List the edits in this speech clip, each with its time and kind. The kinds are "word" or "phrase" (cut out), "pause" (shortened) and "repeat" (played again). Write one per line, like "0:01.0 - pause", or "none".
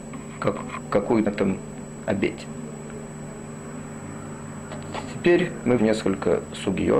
0:01.3 - phrase
0:05.8 - word